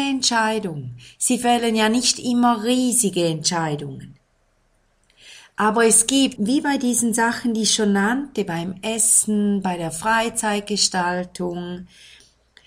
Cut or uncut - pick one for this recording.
cut